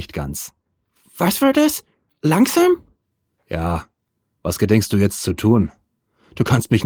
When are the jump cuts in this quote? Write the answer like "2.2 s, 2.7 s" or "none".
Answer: none